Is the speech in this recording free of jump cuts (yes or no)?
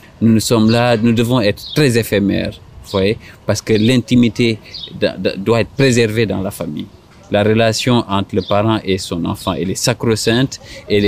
yes